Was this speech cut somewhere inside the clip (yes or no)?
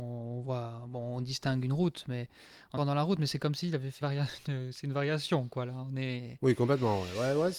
yes